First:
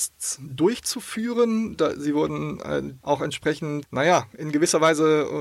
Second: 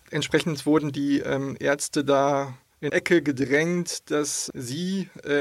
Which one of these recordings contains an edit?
second; 1 cut; at 2.9 s

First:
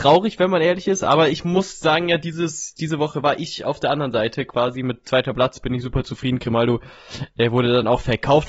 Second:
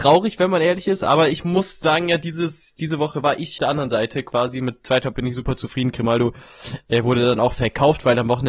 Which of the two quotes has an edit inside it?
second; 2 cuts; at 3.6 s, 5.1 s

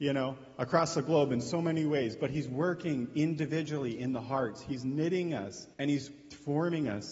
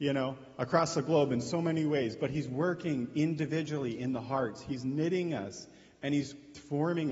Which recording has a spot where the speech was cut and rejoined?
first; 1 cut; at 5.7 s

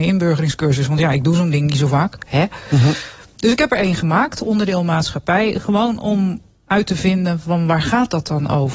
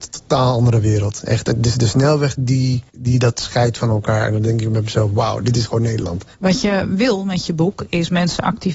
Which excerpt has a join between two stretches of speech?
second; 2 cuts; at 2.9 s, 6.3 s

